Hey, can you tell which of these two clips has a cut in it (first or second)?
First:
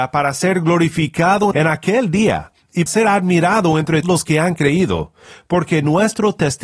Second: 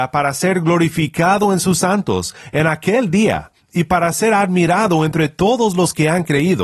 first